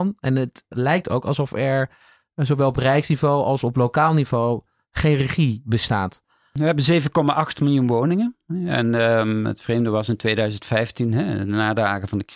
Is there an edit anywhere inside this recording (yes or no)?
no